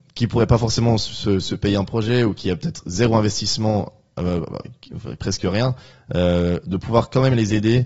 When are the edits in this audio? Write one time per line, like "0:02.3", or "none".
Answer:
none